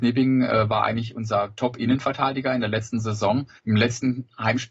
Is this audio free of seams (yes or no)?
no